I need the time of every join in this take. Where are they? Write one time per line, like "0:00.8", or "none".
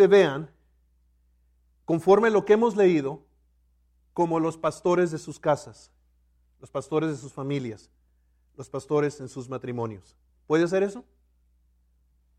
0:10.3

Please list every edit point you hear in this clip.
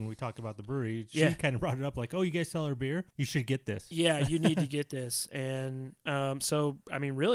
0:03.1

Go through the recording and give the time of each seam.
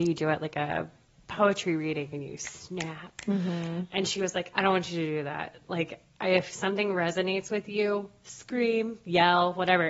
none

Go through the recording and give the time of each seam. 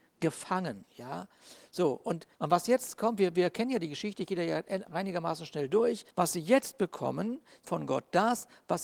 0:02.3
0:06.1
0:07.6

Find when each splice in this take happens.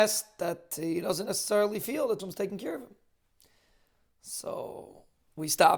0:02.2

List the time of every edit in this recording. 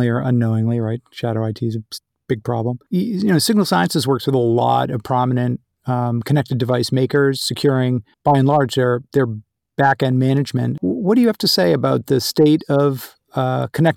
0:08.1

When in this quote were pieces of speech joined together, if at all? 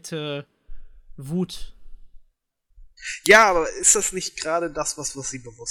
none

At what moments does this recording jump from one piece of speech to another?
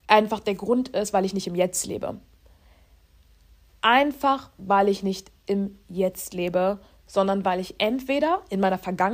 none

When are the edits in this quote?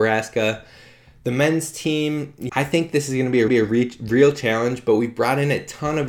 0:02.5
0:03.5

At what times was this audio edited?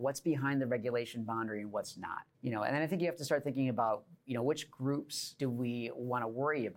0:02.3
0:05.4

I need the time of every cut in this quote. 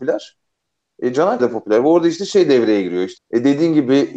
0:01.4
0:03.2

